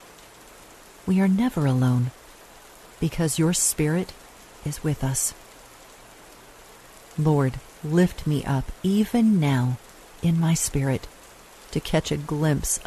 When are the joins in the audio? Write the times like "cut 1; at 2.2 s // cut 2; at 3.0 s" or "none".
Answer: none